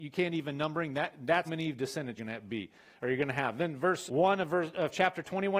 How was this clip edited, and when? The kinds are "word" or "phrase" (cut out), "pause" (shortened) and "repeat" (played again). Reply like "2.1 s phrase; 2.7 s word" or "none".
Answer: 1.4 s word; 2.2 s word; 4.1 s word